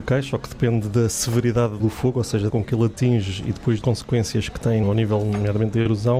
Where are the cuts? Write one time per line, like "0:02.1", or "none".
0:01.8
0:02.5
0:03.8
0:04.8